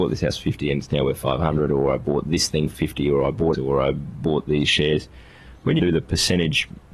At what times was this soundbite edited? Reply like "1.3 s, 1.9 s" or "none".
3.5 s, 5.8 s

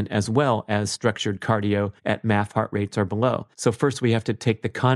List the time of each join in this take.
2.0 s, 3.5 s

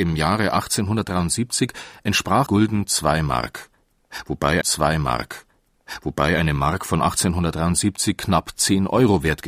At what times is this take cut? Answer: 2.5 s, 4.6 s

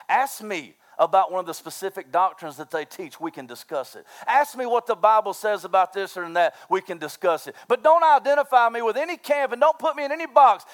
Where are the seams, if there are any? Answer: none

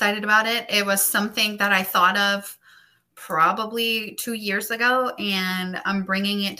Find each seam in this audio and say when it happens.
none

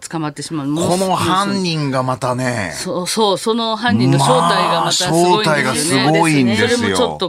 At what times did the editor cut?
none

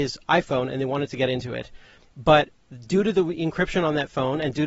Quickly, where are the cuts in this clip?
none

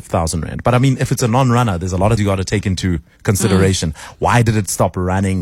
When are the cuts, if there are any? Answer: 2.2 s

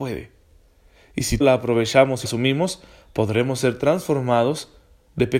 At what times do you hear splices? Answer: 1.4 s, 2.2 s

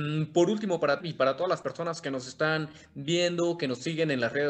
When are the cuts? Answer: 1.0 s

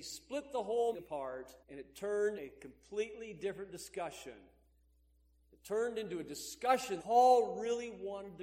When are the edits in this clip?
0.9 s, 1.6 s, 2.4 s, 7.0 s

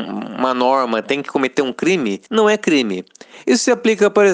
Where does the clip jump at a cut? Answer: 2.3 s

